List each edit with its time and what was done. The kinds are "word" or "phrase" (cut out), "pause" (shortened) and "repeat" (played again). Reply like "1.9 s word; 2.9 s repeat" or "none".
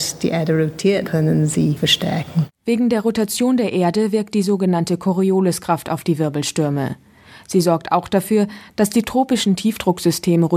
1.0 s word; 1.8 s word